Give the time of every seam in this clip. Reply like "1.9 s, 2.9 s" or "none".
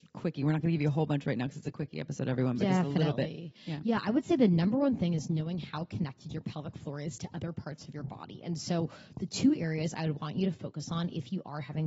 none